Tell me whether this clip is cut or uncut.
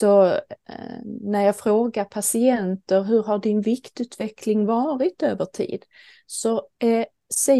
uncut